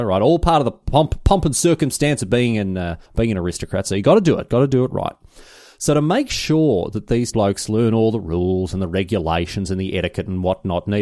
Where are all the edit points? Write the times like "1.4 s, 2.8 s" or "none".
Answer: 3.1 s, 7.3 s